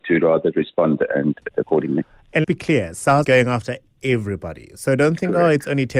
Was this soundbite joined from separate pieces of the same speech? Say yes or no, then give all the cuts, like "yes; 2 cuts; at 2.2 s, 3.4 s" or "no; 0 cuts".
yes; 3 cuts; at 1.5 s, 2.4 s, 3.2 s